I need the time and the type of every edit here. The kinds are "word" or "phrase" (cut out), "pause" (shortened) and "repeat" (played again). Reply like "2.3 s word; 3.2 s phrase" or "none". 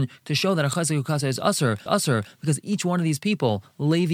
1.9 s repeat